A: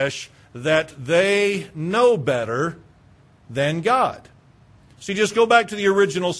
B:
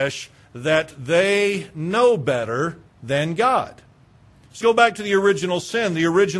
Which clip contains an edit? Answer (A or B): B